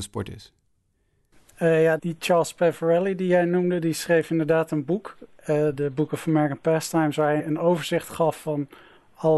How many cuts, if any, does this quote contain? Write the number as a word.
two